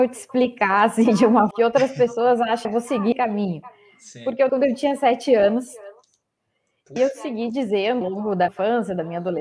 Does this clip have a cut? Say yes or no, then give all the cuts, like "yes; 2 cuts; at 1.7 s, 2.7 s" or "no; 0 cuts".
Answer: yes; 7 cuts; at 1.5 s, 2.6 s, 3.1 s, 4.5 s, 7.0 s, 8.0 s, 8.5 s